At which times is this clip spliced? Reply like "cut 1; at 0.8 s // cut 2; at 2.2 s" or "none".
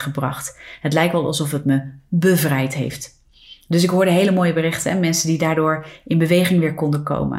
none